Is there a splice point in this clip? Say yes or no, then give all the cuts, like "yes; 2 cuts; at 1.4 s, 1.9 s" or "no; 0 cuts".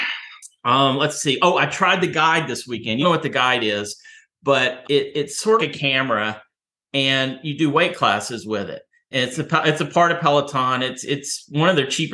yes; 4 cuts; at 3.0 s, 4.8 s, 5.6 s, 9.1 s